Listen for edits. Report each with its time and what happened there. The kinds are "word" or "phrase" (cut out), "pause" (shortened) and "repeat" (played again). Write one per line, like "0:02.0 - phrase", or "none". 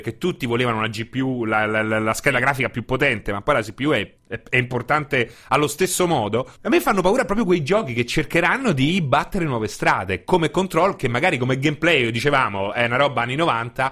0:04.2 - pause
0:06.5 - pause